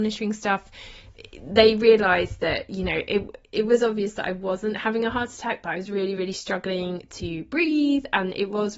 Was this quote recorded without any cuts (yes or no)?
yes